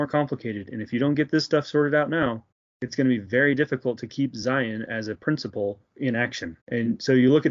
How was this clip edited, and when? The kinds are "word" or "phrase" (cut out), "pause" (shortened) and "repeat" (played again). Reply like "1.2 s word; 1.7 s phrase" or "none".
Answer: 2.5 s pause; 5.9 s pause; 6.6 s pause